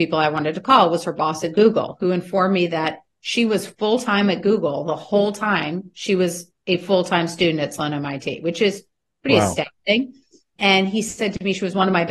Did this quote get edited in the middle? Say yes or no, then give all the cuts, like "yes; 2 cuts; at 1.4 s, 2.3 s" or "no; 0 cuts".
no; 0 cuts